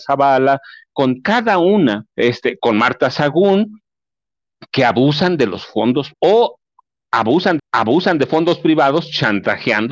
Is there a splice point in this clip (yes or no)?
yes